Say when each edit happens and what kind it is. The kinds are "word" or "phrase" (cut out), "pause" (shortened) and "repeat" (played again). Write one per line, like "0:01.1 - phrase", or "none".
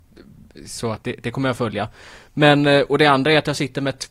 0:01.0 - word
0:01.6 - word